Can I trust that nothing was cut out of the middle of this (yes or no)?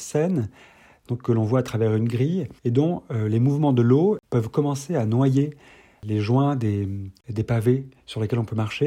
yes